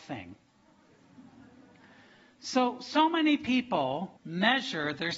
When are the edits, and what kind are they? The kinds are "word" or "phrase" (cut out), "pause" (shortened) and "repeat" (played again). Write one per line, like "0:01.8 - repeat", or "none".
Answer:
0:04.2 - pause